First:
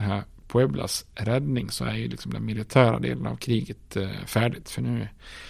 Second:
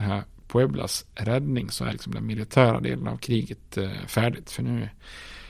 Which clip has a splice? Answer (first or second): second